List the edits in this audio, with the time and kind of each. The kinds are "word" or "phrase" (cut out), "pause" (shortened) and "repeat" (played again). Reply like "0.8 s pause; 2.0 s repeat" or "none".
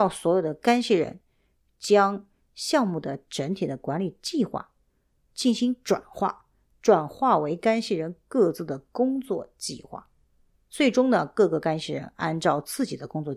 none